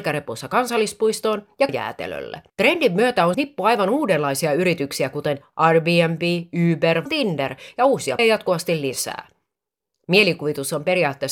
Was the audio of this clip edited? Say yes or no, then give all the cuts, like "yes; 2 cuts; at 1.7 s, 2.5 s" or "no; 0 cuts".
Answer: yes; 5 cuts; at 1.7 s, 2.5 s, 3.3 s, 7.1 s, 8.2 s